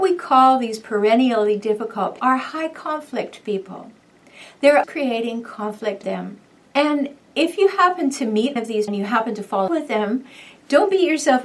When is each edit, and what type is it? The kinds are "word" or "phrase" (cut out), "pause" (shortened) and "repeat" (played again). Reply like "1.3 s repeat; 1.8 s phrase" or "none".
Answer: 2.2 s word; 4.8 s word; 6.0 s word; 6.6 s pause; 8.6 s word; 8.9 s phrase; 9.7 s phrase